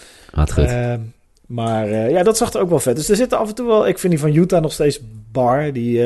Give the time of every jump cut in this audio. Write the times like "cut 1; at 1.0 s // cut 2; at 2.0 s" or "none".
none